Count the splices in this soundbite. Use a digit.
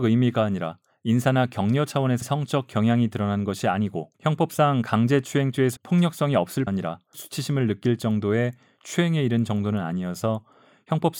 5